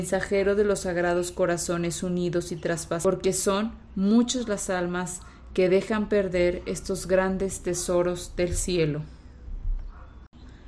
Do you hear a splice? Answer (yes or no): no